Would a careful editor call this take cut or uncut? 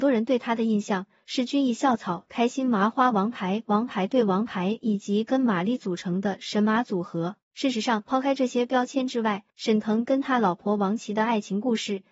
cut